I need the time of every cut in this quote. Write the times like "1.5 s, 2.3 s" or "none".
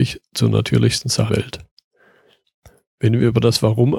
1.3 s